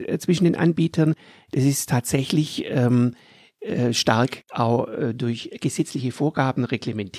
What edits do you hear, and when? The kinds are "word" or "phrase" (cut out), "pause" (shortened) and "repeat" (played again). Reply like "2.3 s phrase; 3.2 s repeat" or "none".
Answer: none